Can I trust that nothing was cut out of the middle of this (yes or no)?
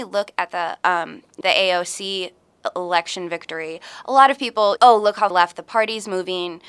no